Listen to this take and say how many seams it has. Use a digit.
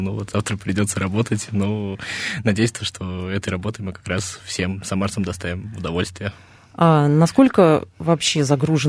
0